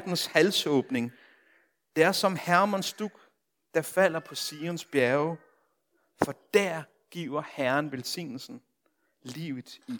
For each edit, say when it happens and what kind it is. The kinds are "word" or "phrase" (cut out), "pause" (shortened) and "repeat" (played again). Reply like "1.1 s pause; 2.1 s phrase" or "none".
none